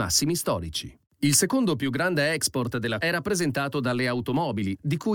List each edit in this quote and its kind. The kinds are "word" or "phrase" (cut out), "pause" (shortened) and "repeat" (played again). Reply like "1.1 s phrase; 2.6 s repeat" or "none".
3.0 s phrase

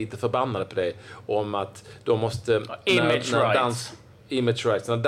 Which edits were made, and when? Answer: none

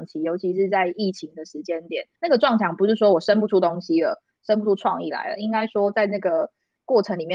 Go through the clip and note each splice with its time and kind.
2.1 s pause

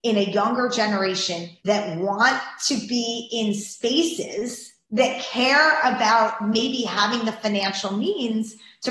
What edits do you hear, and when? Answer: 1.6 s pause; 4.8 s pause

